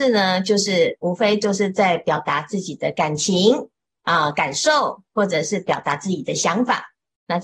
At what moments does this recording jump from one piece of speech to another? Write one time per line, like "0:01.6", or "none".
none